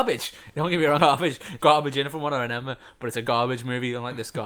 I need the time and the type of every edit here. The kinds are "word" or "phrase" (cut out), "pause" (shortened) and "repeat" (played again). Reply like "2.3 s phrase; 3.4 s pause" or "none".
1.0 s word; 1.6 s word; 3.2 s word